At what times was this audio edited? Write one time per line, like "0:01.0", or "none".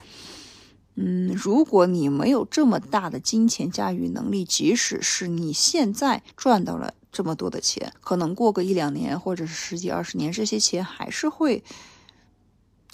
0:06.3
0:07.9